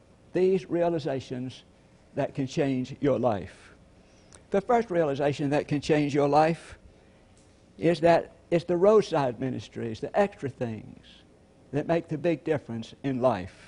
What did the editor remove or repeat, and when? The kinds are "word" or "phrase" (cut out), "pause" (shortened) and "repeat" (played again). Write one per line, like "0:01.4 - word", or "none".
none